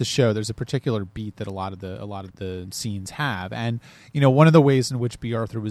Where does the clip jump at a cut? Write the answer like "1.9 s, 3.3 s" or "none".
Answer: 2.3 s